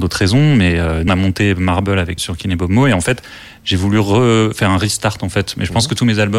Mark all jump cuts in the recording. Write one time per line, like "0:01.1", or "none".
0:01.1
0:02.2